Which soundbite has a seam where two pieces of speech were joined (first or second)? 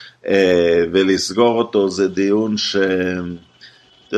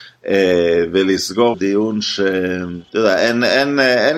second